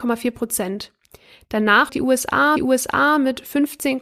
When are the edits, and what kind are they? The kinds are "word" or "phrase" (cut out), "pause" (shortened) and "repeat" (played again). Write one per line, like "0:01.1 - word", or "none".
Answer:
0:01.9 - word
0:02.6 - repeat